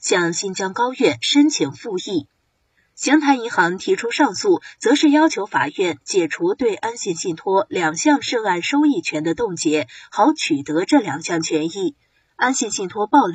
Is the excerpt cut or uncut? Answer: uncut